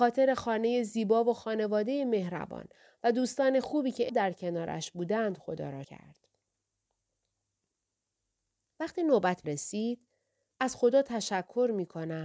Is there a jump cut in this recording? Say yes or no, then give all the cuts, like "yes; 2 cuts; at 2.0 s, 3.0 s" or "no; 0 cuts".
yes; 4 cuts; at 4.1 s, 5.8 s, 9.4 s, 10.5 s